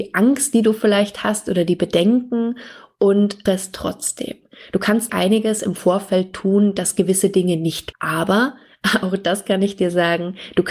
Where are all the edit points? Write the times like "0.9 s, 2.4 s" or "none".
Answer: 3.5 s, 5.1 s, 7.9 s

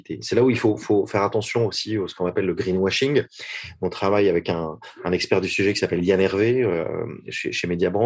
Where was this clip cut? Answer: none

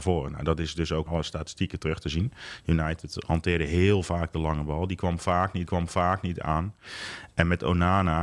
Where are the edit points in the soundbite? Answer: 1.1 s, 5.7 s

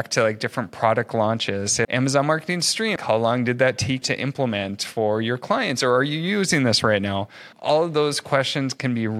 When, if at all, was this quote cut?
1.8 s, 3.0 s, 4.0 s

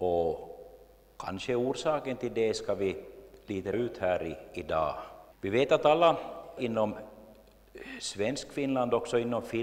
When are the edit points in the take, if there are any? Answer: 3.7 s, 5.3 s, 6.6 s

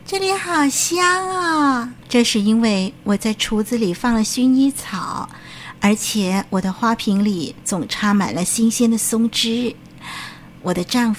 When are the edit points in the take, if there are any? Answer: 2.0 s

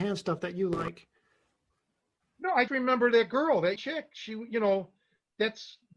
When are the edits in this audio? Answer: 2.7 s, 3.8 s

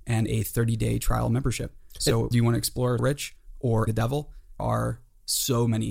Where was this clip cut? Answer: 2.3 s, 3.0 s, 3.9 s, 4.6 s

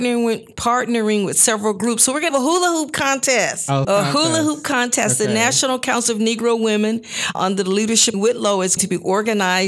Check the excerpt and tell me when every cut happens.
2.3 s, 3.8 s, 7.3 s, 8.1 s, 8.8 s

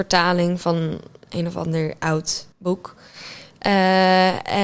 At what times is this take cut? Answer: 2.5 s

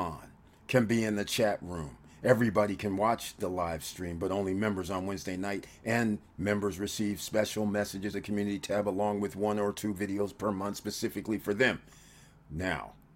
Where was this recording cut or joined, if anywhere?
8.1 s

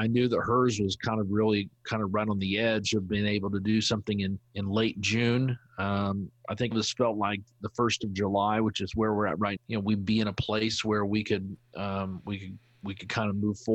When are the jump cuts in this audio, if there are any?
4.5 s, 6.7 s, 9.6 s

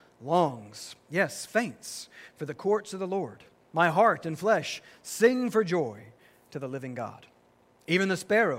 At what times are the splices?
none

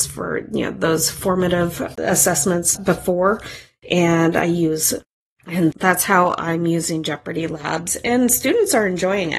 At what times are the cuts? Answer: 2.7 s, 5.7 s

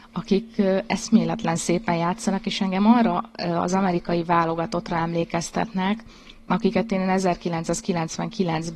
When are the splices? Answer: none

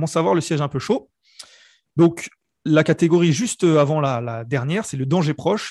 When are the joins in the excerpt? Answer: none

